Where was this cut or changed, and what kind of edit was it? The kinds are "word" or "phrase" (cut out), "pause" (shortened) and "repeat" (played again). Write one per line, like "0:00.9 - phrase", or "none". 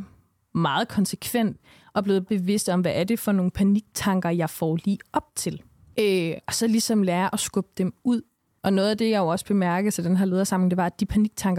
0:02.3 - word